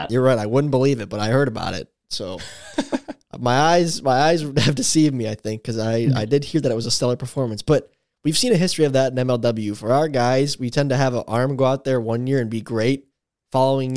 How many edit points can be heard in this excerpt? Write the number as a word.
zero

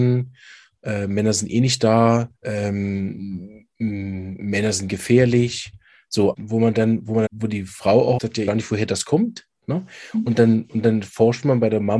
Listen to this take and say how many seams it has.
five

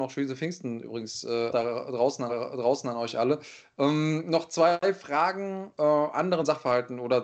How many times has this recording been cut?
three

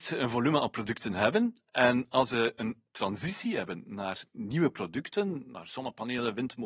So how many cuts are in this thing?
zero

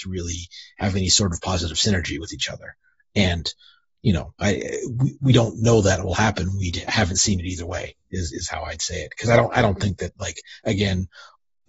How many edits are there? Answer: zero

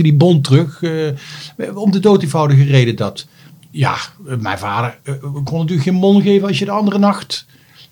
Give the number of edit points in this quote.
zero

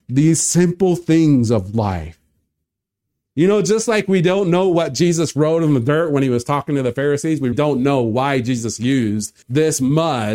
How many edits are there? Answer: two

